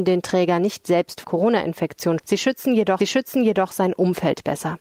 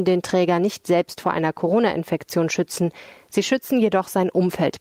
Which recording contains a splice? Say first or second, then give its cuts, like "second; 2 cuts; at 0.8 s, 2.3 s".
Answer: first; 3 cuts; at 1.2 s, 2.2 s, 3.0 s